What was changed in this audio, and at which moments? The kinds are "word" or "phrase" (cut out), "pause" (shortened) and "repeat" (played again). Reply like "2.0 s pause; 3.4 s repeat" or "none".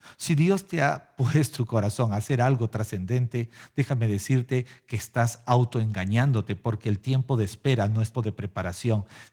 1.5 s word; 8.1 s word